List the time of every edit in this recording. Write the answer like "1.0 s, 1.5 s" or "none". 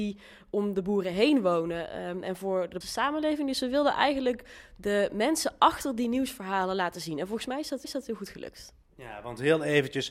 2.8 s, 7.8 s